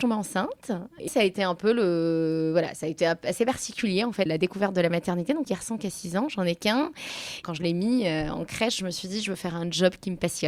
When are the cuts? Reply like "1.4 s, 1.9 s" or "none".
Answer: 1.1 s, 4.3 s, 5.4 s